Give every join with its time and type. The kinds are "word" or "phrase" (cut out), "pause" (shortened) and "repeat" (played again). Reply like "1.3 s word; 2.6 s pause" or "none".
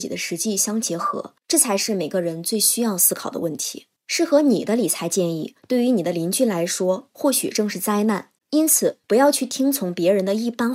1.4 s pause; 4.0 s pause; 5.6 s pause; 8.4 s pause; 9.0 s pause